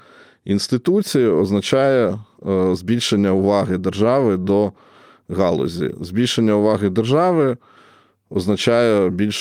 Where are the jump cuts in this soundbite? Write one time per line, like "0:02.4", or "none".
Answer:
none